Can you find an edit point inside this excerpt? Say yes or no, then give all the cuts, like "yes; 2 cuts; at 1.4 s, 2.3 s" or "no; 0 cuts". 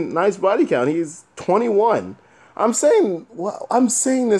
no; 0 cuts